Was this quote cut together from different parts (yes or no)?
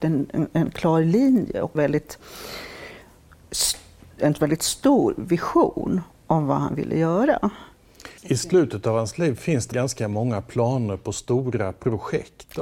yes